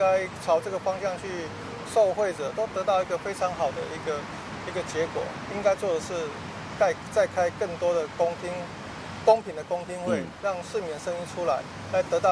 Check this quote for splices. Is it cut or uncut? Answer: cut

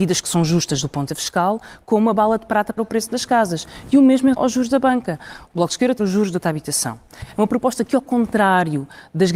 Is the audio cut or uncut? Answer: cut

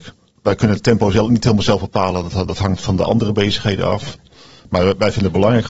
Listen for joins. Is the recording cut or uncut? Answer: uncut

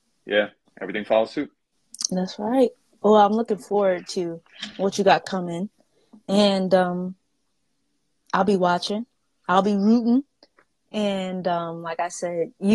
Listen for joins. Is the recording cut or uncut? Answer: uncut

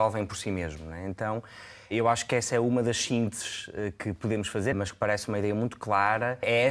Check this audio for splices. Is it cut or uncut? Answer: cut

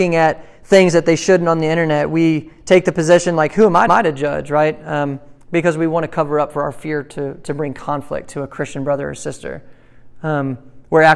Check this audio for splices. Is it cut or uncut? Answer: cut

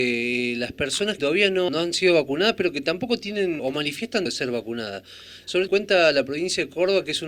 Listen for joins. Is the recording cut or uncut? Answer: cut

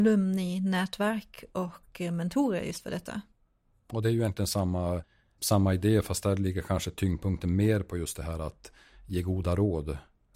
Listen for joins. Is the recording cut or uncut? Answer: uncut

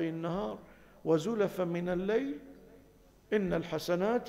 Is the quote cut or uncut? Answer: uncut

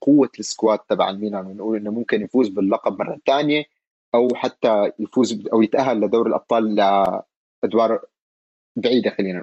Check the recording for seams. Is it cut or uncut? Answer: uncut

